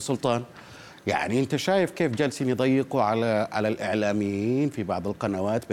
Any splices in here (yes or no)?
no